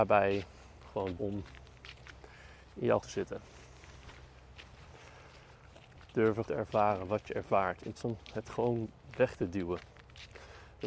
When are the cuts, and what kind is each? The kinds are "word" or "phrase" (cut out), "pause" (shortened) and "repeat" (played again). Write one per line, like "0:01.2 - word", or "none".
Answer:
0:01.2 - word
0:03.0 - word
0:06.5 - word
0:08.0 - word